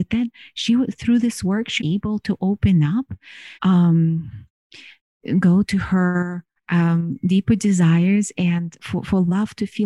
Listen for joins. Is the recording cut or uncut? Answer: cut